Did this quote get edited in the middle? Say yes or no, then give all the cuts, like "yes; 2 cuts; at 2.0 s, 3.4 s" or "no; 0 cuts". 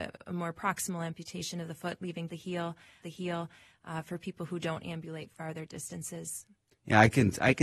yes; 2 cuts; at 2.3 s, 3.0 s